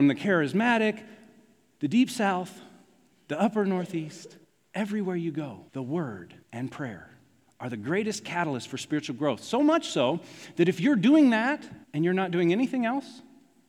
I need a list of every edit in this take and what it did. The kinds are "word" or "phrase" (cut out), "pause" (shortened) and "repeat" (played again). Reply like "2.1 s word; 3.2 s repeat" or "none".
4.4 s pause; 5.7 s pause; 6.4 s pause; 11.8 s pause